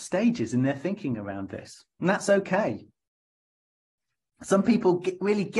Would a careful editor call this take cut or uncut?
uncut